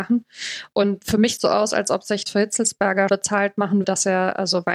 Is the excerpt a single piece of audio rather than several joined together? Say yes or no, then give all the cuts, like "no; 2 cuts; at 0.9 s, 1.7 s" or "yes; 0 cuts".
no; 5 cuts; at 1.0 s, 1.4 s, 2.3 s, 3.1 s, 3.8 s